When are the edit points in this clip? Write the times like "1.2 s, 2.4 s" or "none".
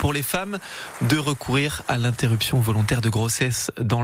none